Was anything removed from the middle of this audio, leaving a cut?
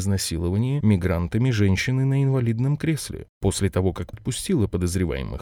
yes; 1 cut; at 4.1 s

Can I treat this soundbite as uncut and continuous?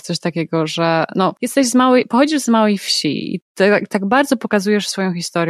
no; 1 cut; at 1.4 s

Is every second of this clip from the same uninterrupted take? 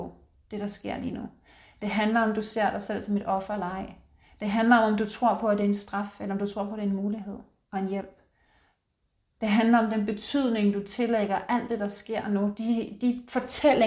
yes; 0 cuts

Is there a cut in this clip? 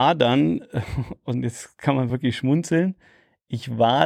no; 0 cuts

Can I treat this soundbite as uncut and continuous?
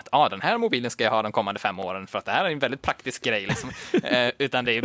yes; 0 cuts

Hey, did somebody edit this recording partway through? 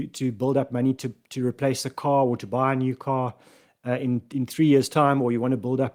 no; 0 cuts

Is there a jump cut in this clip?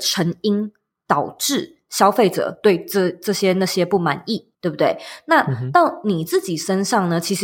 yes; 1 cut; at 4.5 s

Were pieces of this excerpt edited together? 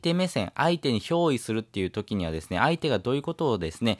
no; 0 cuts

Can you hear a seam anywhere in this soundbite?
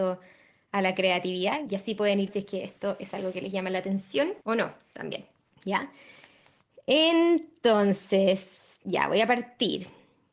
yes; 3 cuts; at 2.3 s, 4.4 s, 5.5 s

